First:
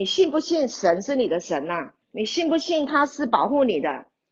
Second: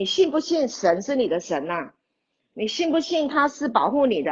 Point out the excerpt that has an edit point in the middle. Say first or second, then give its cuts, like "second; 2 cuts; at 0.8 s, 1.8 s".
first; 1 cut; at 2.0 s